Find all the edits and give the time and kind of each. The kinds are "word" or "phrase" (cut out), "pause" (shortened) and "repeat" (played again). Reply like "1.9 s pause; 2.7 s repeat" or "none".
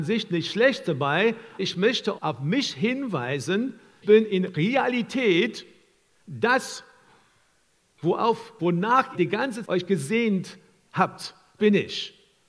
1.6 s word; 2.2 s word; 4.0 s word; 8.6 s word; 9.1 s word; 9.6 s word; 11.6 s word